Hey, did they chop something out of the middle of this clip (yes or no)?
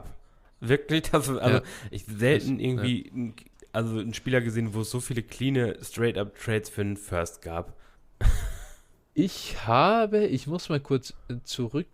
no